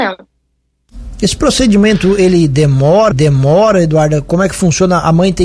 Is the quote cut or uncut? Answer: cut